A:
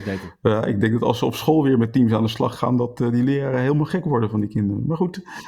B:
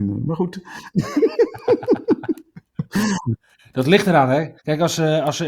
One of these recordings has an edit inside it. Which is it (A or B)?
B